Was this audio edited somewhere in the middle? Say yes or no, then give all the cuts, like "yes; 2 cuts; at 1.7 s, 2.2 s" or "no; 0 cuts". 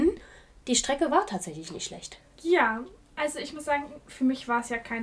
no; 0 cuts